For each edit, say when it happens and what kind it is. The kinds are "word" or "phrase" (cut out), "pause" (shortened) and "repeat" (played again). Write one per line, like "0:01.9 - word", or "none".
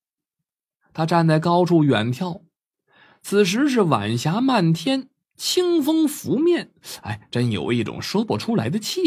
none